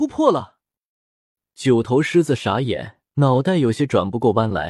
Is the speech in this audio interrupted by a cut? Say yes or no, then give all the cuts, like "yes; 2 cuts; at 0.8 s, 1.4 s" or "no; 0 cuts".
yes; 1 cut; at 3.0 s